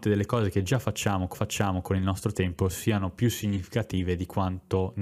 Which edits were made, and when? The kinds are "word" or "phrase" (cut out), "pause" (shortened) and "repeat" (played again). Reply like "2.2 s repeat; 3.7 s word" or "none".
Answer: 1.3 s repeat